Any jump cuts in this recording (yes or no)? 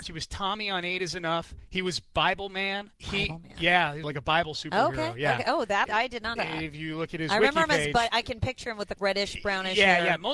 yes